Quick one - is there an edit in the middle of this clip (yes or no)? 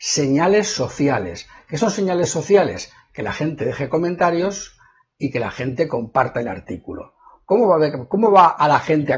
no